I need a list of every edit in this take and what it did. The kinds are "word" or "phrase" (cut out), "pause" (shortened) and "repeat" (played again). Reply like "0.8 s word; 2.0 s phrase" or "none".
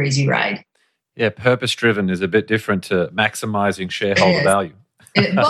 none